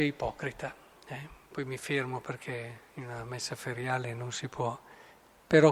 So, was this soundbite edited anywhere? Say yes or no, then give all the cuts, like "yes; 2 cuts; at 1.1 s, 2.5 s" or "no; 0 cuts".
no; 0 cuts